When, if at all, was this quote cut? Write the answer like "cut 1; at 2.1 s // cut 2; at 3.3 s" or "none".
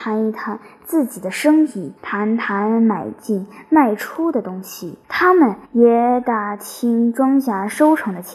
cut 1; at 2.0 s // cut 2; at 5.0 s // cut 3; at 5.6 s